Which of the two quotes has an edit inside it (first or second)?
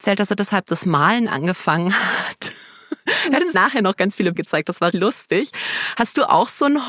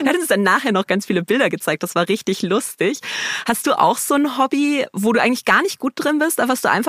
first